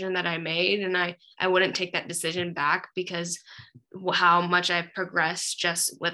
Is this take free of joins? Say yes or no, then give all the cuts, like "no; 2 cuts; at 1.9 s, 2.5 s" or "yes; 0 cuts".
yes; 0 cuts